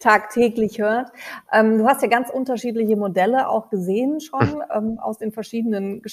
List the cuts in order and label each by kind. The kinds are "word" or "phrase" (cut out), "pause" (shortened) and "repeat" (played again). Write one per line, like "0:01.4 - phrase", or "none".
none